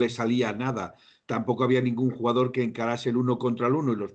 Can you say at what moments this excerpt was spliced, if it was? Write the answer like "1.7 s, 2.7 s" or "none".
none